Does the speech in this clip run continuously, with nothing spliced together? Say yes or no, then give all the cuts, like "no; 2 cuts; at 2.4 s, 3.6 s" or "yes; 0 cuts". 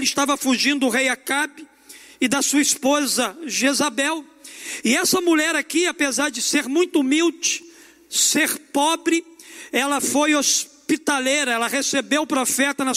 yes; 0 cuts